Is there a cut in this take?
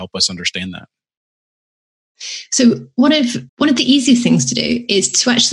yes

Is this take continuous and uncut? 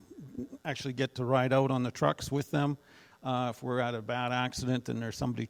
yes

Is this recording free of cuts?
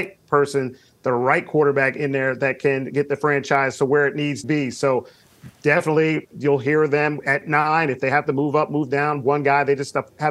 no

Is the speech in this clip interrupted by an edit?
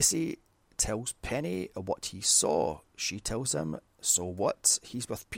yes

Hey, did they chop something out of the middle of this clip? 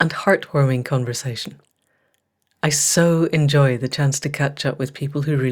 no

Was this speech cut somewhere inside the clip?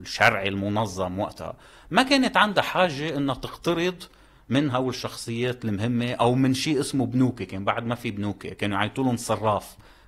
no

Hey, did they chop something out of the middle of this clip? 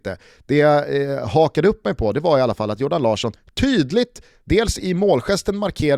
yes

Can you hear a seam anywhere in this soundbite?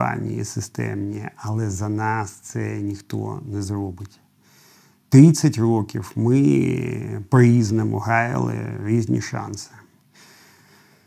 no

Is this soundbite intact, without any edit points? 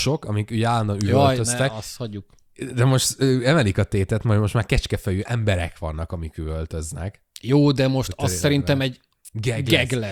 yes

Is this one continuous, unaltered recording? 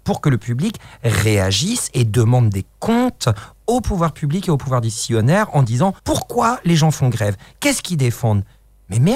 no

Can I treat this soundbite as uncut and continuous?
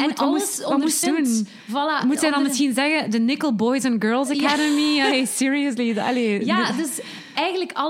no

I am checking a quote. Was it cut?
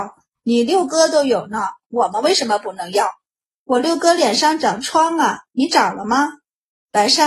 no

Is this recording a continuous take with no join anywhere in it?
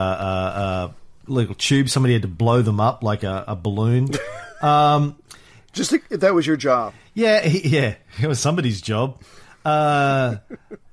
yes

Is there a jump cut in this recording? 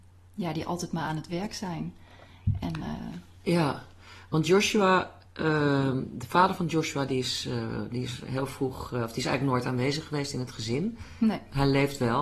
no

